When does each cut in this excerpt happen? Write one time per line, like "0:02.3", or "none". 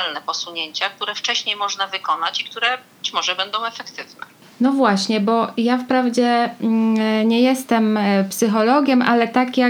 none